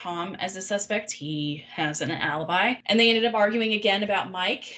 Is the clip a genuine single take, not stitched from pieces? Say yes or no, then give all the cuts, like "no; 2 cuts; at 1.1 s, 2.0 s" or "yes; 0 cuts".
no; 1 cut; at 1.1 s